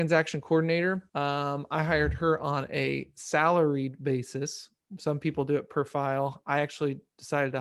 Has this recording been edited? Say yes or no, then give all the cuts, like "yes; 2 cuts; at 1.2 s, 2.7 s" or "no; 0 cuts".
yes; 1 cut; at 1.1 s